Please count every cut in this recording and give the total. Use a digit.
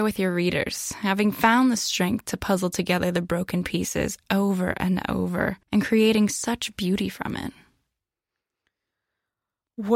1